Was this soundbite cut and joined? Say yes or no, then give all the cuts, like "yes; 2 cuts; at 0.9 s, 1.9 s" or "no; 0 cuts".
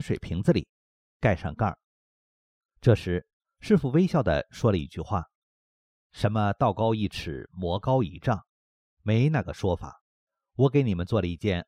no; 0 cuts